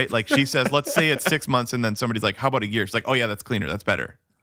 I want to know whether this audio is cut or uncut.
uncut